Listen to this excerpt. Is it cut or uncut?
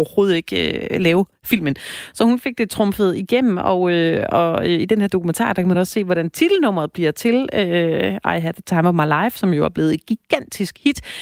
uncut